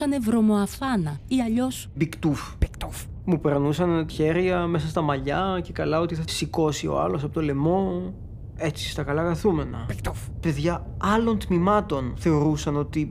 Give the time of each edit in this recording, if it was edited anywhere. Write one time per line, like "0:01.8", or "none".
0:04.1
0:06.3